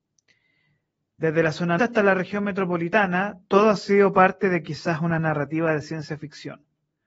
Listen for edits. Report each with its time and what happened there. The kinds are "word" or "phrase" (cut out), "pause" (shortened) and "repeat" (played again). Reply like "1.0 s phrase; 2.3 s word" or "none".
1.8 s word